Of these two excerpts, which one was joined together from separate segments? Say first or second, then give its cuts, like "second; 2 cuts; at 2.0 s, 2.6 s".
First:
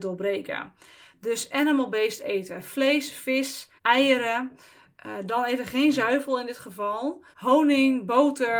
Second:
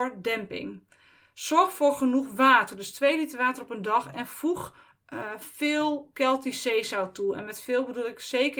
first; 2 cuts; at 3.8 s, 7.3 s